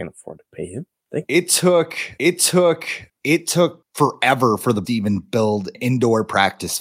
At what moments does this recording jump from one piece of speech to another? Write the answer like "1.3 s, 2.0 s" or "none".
2.2 s, 4.8 s, 5.7 s